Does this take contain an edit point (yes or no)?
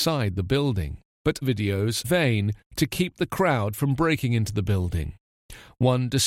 yes